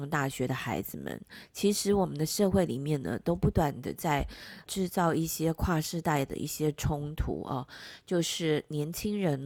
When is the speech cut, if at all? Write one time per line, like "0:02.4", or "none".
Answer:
0:04.7